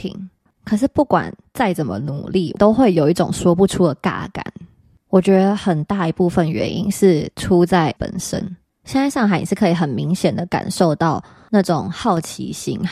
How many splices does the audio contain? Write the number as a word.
one